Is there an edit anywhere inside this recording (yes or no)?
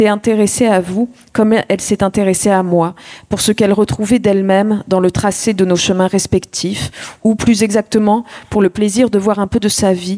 no